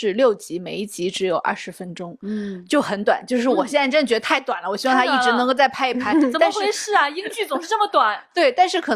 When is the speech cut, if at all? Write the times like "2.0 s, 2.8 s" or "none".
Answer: none